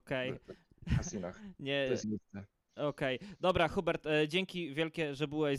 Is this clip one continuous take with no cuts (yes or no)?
no